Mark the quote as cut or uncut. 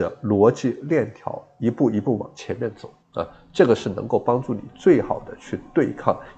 cut